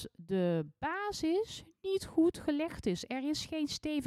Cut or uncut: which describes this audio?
uncut